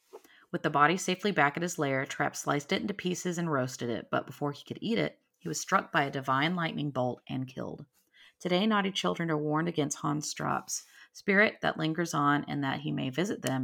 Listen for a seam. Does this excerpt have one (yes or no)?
no